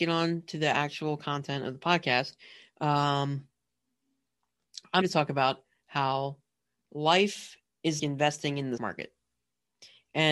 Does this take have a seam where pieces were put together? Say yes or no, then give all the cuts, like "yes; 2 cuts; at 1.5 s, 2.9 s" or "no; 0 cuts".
yes; 3 cuts; at 5.0 s, 8.0 s, 8.8 s